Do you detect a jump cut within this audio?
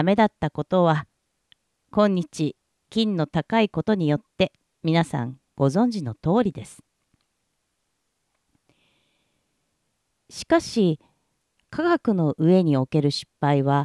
no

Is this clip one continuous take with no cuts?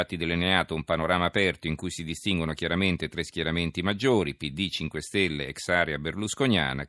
yes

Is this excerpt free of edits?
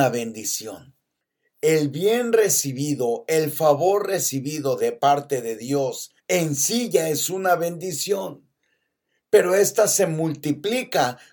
no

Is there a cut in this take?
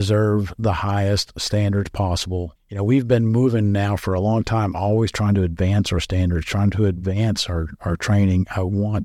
no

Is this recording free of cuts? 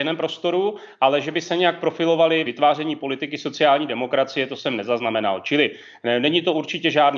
no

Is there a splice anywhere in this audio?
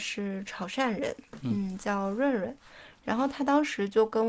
no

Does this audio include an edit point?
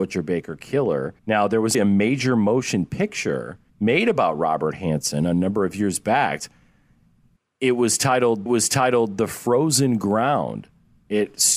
yes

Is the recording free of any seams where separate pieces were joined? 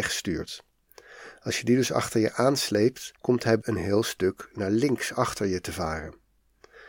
no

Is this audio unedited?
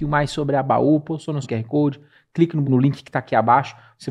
no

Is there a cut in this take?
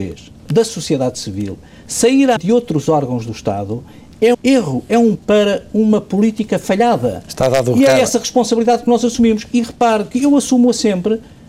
yes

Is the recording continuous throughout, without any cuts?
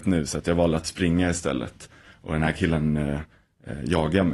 yes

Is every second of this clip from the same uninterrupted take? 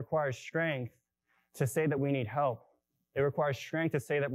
yes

